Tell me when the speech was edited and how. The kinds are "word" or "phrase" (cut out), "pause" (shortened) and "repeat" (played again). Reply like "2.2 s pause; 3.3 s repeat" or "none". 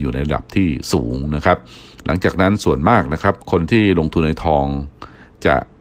3.4 s pause